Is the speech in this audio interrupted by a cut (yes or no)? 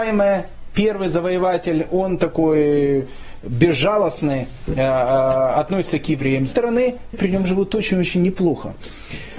yes